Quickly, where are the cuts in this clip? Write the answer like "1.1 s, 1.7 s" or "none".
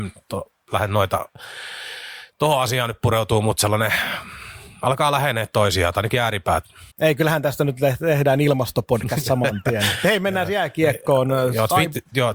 6.9 s